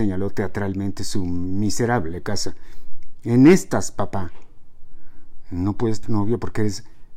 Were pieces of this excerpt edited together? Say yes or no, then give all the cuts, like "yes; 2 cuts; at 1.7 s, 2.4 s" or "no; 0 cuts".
yes; 1 cut; at 6.0 s